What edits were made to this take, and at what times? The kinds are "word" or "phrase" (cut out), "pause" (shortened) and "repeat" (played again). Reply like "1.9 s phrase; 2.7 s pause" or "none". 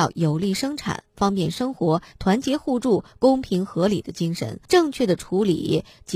4.7 s pause